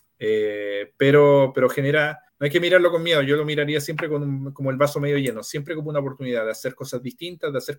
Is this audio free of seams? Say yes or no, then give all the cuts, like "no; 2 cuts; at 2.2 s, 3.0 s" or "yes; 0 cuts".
no; 1 cut; at 2.3 s